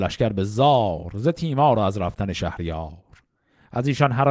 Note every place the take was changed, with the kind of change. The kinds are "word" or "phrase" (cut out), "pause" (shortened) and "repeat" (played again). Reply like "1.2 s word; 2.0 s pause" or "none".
none